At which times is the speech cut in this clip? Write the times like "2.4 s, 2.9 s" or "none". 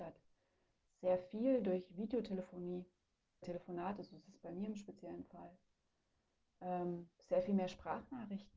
3.4 s, 7.1 s